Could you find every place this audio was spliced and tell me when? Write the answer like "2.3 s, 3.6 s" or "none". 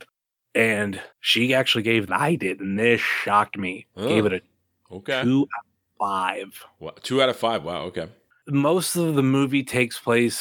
1.1 s, 2.1 s